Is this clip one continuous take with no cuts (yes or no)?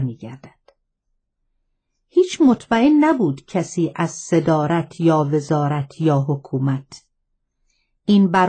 yes